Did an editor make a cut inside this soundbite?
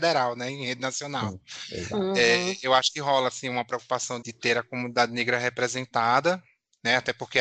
yes; 1 cut; at 4.2 s

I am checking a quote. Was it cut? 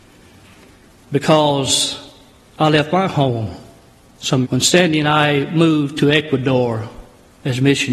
yes; 1 cut; at 4.4 s

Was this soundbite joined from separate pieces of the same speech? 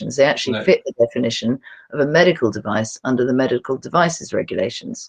no; 0 cuts

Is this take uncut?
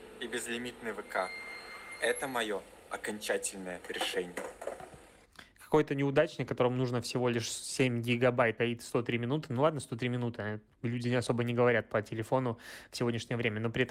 no; 1 cut; at 8.6 s

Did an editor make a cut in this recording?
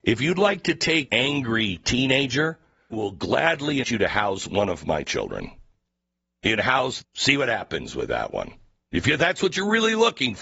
yes; 4 cuts; at 1.1 s, 2.9 s, 3.8 s, 7.0 s

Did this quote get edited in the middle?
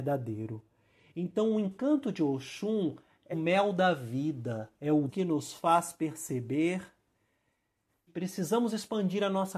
yes; 4 cuts; at 3.3 s, 4.8 s, 5.1 s, 8.1 s

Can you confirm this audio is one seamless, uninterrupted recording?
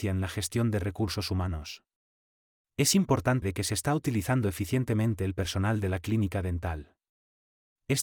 no; 1 cut; at 3.4 s

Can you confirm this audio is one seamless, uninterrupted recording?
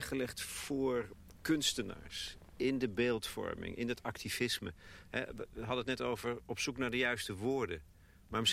yes; 0 cuts

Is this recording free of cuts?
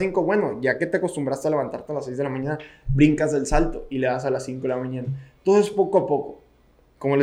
yes; 0 cuts

